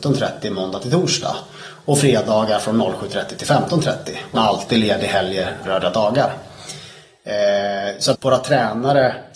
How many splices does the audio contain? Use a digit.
3